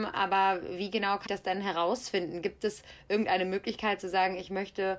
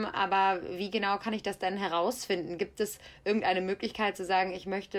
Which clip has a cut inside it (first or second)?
first